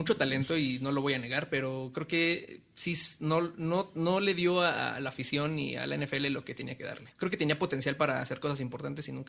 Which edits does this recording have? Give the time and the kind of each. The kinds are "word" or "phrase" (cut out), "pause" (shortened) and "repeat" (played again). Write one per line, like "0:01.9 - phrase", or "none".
0:07.1 - pause